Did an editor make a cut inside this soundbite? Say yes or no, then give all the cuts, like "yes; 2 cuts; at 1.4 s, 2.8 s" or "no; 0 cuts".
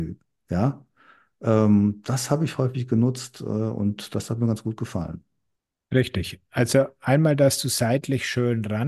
no; 0 cuts